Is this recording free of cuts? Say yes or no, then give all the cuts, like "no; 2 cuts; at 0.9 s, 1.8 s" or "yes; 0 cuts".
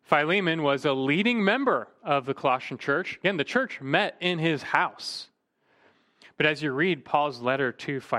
yes; 0 cuts